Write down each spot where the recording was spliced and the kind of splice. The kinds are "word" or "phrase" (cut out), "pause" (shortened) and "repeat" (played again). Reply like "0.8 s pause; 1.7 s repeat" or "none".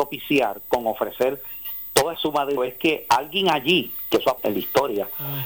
2.1 s word; 2.6 s word; 4.4 s word